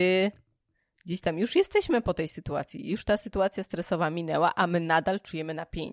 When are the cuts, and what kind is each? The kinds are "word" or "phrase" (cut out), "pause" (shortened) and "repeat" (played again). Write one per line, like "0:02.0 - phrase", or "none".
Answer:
none